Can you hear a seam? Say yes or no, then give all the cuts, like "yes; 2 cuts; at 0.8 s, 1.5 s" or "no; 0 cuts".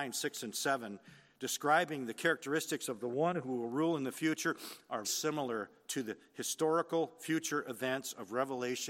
yes; 1 cut; at 5.0 s